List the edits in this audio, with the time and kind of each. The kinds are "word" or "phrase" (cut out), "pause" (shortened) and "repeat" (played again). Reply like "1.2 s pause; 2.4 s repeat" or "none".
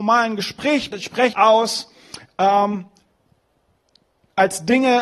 0.9 s word; 1.3 s word

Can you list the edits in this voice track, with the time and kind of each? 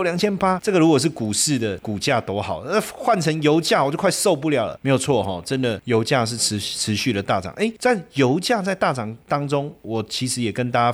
none

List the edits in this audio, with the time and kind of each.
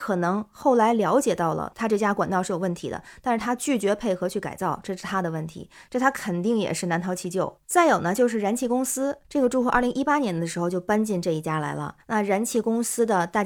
7.6 s pause; 9.2 s pause; 12.0 s pause

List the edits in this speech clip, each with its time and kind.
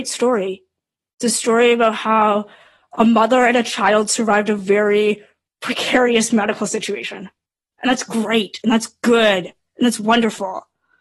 none

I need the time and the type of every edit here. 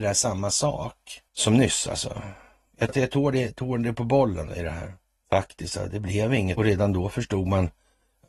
1.3 s pause; 2.9 s word; 4.5 s word; 5.2 s pause; 6.6 s phrase

